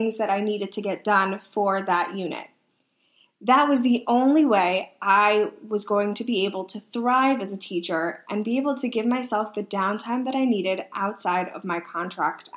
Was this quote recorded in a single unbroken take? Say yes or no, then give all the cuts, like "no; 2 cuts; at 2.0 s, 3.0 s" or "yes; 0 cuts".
yes; 0 cuts